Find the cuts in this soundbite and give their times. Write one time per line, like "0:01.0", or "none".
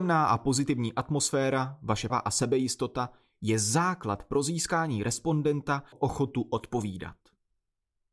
0:02.1
0:05.9